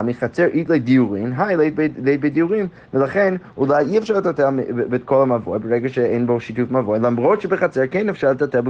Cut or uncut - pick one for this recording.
uncut